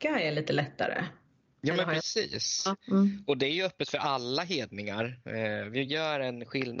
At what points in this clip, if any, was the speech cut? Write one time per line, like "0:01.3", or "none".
none